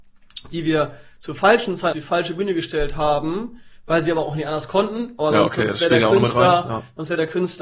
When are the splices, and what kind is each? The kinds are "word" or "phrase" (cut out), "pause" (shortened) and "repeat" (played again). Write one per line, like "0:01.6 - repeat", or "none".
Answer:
0:01.9 - word